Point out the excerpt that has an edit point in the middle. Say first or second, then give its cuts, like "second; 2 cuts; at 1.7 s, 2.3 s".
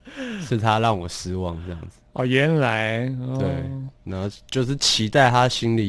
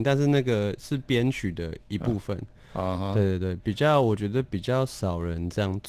first; 1 cut; at 3.9 s